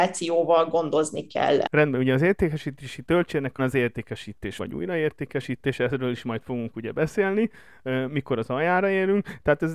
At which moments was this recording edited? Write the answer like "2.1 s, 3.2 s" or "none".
3.6 s, 4.6 s